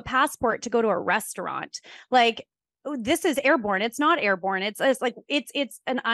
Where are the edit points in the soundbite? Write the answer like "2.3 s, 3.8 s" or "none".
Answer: none